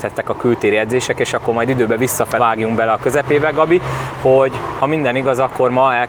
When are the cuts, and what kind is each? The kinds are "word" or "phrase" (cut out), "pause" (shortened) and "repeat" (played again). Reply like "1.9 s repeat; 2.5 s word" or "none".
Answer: 2.4 s word